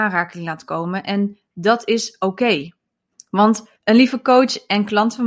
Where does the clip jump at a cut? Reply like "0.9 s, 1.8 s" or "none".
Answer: 3.8 s